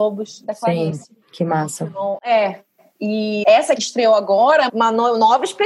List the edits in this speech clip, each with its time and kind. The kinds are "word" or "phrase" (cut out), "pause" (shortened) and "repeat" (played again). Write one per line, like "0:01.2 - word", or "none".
0:01.2 - pause
0:03.4 - word
0:03.8 - phrase
0:04.7 - word